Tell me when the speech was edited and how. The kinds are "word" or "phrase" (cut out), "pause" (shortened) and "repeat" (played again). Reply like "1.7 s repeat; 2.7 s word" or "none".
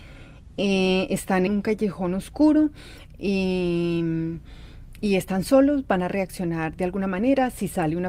1.5 s word